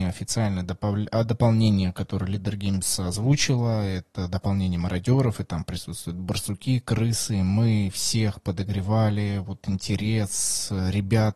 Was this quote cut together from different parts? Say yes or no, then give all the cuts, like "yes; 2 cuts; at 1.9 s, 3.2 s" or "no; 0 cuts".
no; 0 cuts